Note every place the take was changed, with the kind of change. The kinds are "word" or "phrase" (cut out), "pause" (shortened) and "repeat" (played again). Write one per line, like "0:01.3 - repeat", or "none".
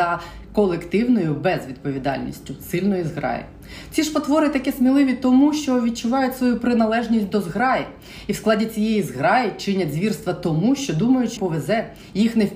0:11.4 - word